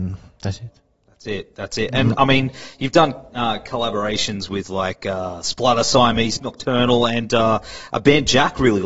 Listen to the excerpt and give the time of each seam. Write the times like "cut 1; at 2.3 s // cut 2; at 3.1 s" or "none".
cut 1; at 6.4 s